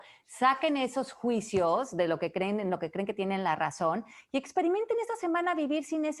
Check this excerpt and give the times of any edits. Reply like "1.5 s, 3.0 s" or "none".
none